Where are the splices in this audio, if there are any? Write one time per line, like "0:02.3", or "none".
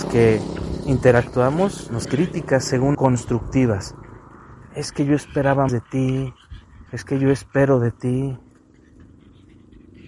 0:02.0
0:02.9
0:05.7
0:06.9